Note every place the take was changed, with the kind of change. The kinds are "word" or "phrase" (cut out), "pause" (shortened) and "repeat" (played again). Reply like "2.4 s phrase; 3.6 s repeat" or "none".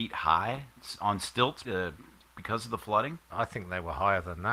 1.6 s word